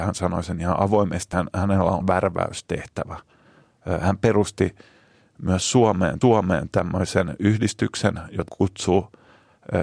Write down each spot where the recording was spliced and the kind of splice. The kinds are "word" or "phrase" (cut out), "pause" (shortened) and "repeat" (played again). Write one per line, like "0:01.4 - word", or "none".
0:01.3 - word
0:02.0 - phrase
0:06.2 - repeat
0:08.5 - word